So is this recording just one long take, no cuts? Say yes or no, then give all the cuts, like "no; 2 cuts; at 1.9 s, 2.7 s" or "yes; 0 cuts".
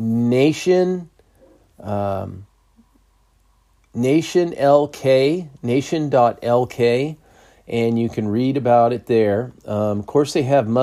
yes; 0 cuts